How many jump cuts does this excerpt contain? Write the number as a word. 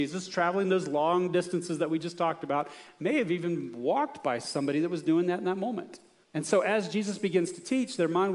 one